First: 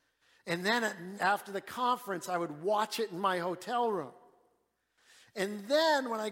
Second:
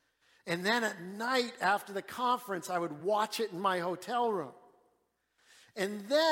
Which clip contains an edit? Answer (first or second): first